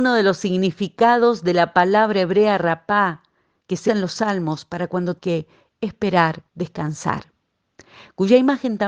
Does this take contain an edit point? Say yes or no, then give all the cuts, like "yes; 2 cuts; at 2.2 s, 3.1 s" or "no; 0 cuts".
yes; 3 cuts; at 3.9 s, 5.2 s, 6.5 s